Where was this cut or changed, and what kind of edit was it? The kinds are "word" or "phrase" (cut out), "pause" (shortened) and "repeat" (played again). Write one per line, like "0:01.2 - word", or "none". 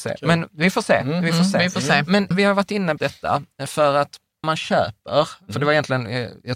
0:02.3 - word
0:03.0 - word
0:04.4 - word